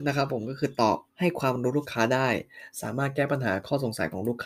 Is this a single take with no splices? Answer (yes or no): no